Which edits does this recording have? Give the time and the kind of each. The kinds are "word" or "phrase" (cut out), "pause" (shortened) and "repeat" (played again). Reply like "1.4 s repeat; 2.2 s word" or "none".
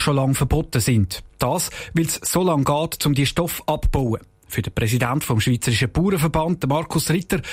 none